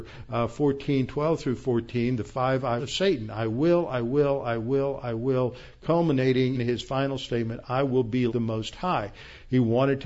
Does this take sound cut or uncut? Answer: cut